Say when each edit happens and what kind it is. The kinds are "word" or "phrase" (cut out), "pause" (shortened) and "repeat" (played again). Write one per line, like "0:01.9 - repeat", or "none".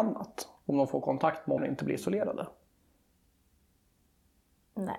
0:01.6 - word